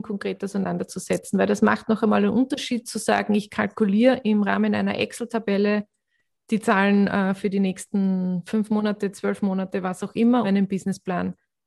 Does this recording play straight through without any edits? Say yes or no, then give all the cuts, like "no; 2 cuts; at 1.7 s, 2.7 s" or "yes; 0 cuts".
no; 1 cut; at 10.4 s